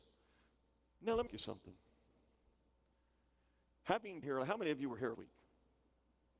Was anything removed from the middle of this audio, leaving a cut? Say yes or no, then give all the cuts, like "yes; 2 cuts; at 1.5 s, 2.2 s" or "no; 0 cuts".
yes; 3 cuts; at 1.3 s, 4.2 s, 5.1 s